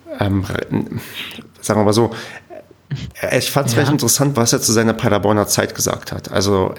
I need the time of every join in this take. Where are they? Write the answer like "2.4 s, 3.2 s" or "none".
none